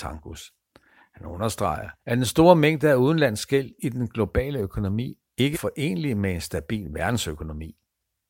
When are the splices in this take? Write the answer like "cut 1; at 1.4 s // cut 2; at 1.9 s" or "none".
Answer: cut 1; at 2.0 s // cut 2; at 5.5 s